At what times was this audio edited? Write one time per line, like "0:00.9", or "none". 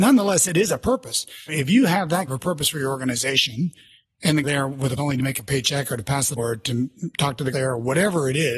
0:01.5
0:02.3
0:04.4
0:05.0
0:06.4
0:07.5